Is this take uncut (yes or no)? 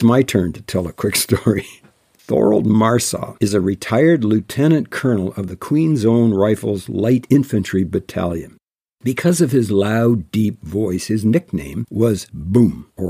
yes